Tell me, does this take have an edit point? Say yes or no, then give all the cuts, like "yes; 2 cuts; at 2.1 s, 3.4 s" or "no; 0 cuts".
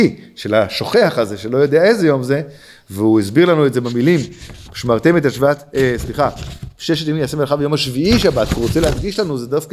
no; 0 cuts